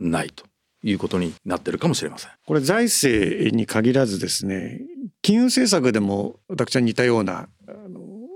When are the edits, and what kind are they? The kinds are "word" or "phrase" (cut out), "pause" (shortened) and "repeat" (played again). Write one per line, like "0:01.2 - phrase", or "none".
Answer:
0:01.4 - pause
0:02.4 - pause
0:06.4 - pause